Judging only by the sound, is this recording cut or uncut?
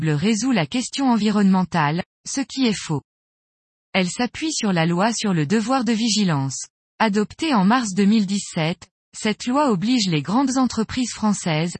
uncut